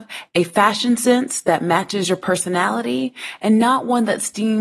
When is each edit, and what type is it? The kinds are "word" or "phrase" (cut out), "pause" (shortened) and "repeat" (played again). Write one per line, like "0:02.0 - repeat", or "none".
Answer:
none